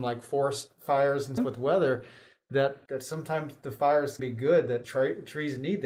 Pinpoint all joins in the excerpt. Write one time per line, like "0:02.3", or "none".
0:01.4
0:02.9
0:04.2
0:04.8